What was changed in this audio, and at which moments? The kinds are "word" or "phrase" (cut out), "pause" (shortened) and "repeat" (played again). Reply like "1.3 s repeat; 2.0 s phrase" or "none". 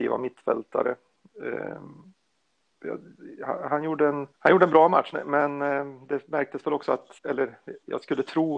4.3 s pause; 5.1 s word; 7.2 s pause